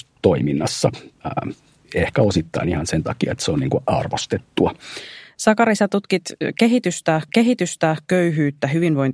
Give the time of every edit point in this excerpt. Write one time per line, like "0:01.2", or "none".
0:07.3